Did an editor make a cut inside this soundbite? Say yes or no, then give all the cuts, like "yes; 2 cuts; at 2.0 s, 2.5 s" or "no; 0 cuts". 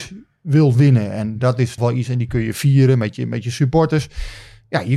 yes; 1 cut; at 1.8 s